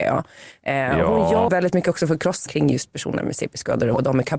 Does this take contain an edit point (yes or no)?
yes